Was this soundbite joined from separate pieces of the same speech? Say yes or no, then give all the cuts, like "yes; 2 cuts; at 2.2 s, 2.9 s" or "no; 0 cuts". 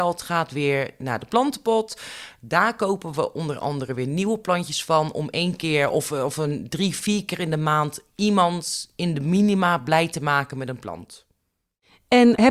no; 0 cuts